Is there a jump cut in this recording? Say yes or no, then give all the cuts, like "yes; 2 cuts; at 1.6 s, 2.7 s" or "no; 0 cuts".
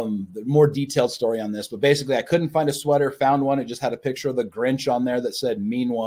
no; 0 cuts